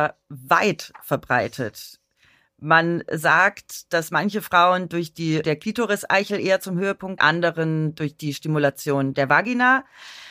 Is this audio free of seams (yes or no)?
no